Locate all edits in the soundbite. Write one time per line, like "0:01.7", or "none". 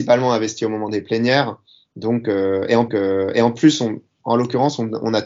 0:02.9